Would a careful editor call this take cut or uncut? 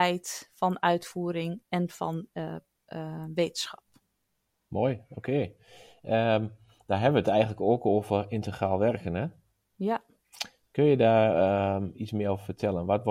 uncut